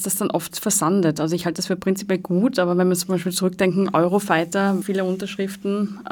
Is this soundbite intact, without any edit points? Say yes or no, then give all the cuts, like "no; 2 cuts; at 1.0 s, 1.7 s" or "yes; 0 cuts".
no; 1 cut; at 4.8 s